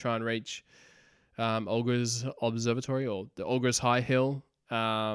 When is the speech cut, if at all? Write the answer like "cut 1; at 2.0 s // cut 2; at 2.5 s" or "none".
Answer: none